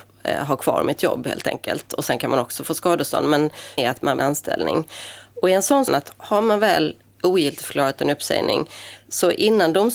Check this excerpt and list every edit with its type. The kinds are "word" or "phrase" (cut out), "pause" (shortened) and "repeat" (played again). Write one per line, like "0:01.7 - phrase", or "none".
0:03.8 - word
0:04.2 - phrase
0:05.9 - phrase